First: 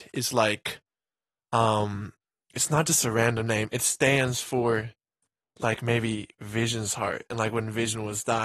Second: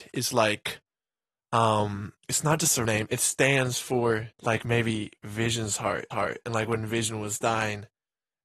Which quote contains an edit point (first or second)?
second